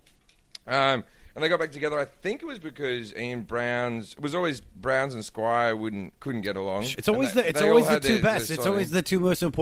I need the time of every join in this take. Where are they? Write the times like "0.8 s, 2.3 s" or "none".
6.2 s